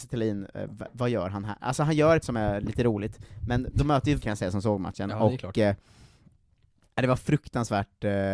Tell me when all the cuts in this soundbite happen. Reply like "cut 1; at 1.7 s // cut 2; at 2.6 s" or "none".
cut 1; at 2.2 s // cut 2; at 4.2 s